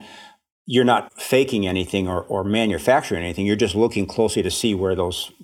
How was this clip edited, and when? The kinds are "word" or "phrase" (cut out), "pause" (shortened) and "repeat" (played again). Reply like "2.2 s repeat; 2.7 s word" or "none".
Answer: none

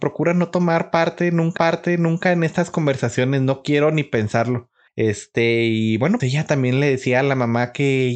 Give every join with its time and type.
1.6 s repeat; 4.9 s pause; 6.2 s word

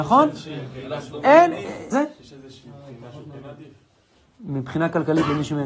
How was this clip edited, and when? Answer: 1.9 s word

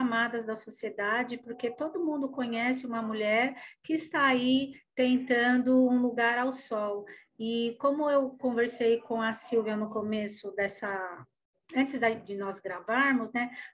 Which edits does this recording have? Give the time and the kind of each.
none

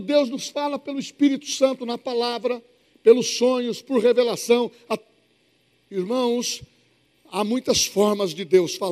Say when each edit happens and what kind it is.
none

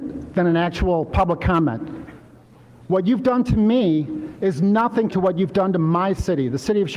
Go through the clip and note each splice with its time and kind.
5.1 s word

